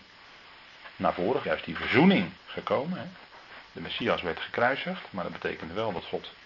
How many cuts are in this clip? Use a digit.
2